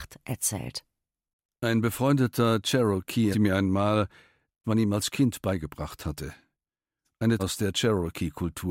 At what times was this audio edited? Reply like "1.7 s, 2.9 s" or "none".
3.3 s, 4.6 s, 7.4 s